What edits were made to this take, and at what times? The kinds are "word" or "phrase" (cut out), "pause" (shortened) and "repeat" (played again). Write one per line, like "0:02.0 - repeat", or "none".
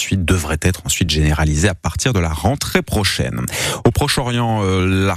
none

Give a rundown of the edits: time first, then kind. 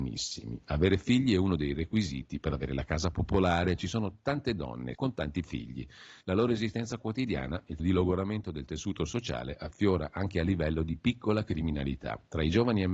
0:04.9 - word
0:06.2 - pause
0:07.8 - word

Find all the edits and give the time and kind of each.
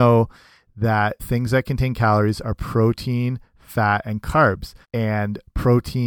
0:01.2 - word
0:04.8 - pause

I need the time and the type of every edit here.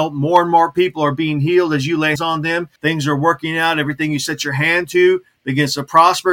0:02.2 - word
0:02.8 - pause

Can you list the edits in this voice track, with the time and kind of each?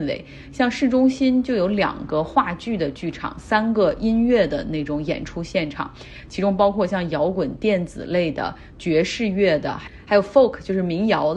none

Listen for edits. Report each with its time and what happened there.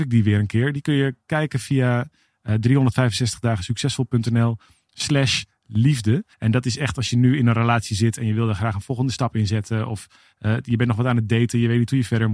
0:06.3 - pause

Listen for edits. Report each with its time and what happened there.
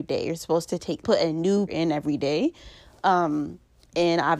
0:01.0 - word
0:01.7 - word

